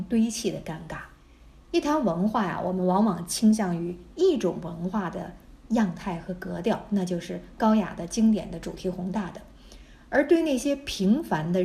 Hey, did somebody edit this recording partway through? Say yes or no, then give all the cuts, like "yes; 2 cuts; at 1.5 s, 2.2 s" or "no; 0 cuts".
no; 0 cuts